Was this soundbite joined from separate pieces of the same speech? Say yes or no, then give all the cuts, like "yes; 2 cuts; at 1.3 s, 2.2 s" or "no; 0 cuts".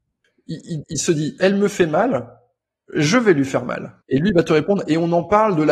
yes; 1 cut; at 4.0 s